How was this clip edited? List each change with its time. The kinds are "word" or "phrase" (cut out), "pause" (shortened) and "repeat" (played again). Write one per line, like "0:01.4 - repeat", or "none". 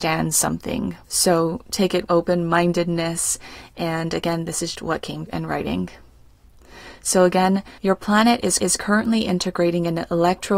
0:01.0 - pause
0:02.1 - word
0:04.8 - word
0:05.3 - word
0:07.8 - pause
0:08.6 - repeat